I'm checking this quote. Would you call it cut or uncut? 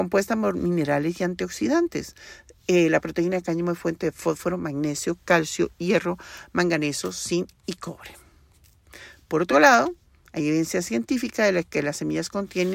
uncut